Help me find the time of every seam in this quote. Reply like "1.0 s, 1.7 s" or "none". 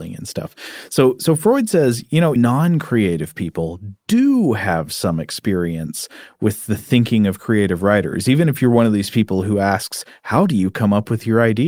2.4 s

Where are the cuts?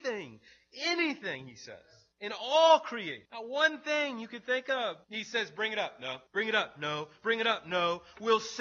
2.1 s, 3.2 s, 5.0 s, 6.3 s

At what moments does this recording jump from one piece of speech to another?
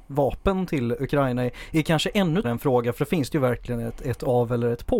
2.4 s

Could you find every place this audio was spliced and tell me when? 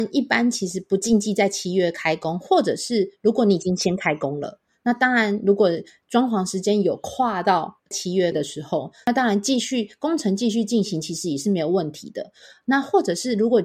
none

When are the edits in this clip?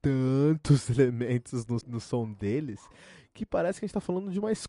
1.8 s

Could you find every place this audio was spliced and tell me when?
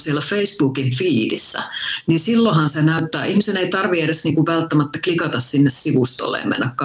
none

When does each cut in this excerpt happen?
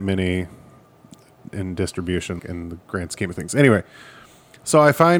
2.4 s

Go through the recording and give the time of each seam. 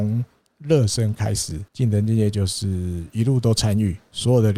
1.7 s

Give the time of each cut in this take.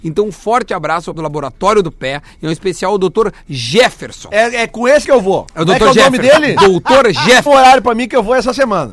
1.1 s, 5.0 s, 7.5 s

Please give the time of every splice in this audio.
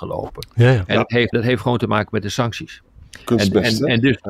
1.3 s

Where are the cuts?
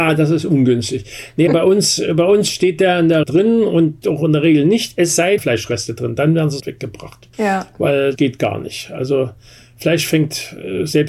1.5 s, 3.2 s, 4.0 s, 5.4 s, 6.6 s, 7.3 s, 8.2 s

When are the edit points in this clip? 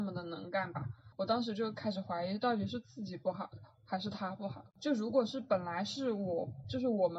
1.1 s

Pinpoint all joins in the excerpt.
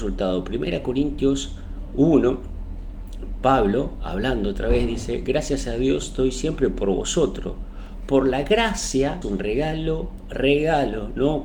9.2 s

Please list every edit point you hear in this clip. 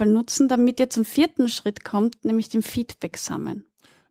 none

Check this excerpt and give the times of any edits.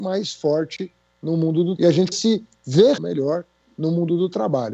1.8 s, 2.1 s, 3.0 s

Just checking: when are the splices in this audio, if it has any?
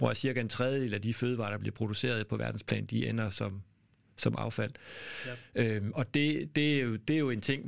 none

